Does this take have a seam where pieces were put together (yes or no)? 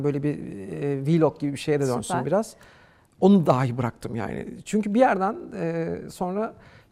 no